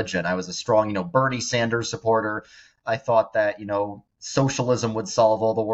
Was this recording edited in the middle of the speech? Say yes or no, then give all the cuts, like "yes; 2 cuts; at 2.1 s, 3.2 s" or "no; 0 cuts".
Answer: no; 0 cuts